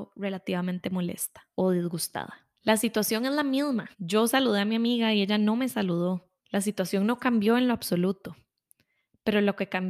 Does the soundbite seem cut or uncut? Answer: cut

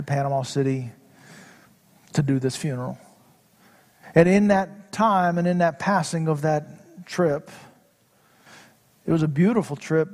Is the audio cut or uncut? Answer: uncut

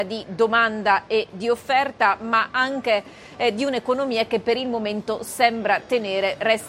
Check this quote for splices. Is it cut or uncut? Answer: uncut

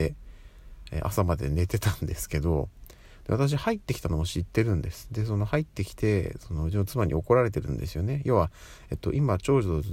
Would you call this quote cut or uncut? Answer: uncut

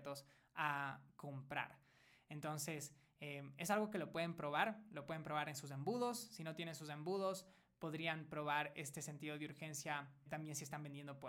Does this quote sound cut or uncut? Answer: cut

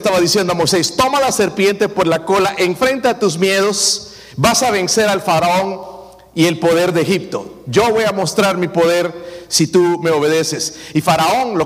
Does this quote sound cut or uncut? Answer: uncut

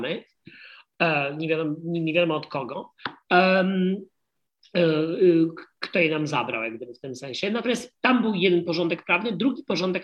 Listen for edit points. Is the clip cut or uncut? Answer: uncut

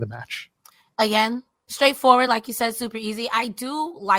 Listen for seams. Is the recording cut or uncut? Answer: uncut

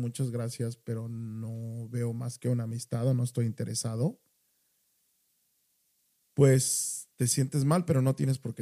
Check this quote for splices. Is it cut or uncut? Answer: cut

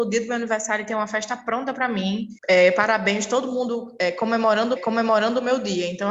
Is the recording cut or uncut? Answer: cut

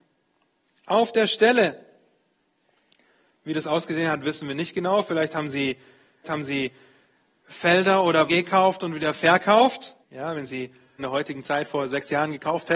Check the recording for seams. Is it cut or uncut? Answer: cut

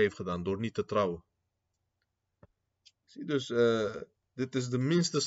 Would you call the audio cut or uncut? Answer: uncut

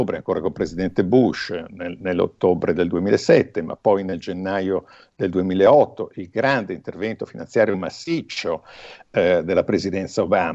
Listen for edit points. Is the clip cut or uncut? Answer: uncut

